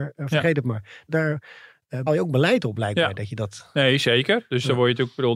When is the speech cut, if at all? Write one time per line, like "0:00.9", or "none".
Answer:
0:02.1